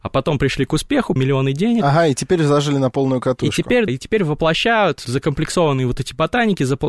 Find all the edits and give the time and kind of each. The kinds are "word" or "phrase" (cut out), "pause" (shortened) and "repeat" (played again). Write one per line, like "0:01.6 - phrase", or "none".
0:01.2 - word
0:03.9 - word
0:05.0 - word